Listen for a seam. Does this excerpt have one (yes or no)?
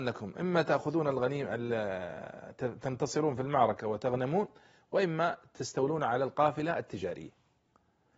no